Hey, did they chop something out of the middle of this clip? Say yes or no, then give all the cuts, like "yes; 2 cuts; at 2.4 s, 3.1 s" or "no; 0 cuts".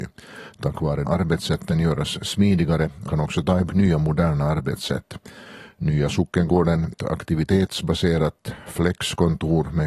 yes; 4 cuts; at 1.0 s, 3.1 s, 3.7 s, 6.9 s